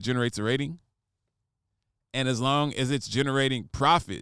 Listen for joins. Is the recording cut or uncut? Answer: uncut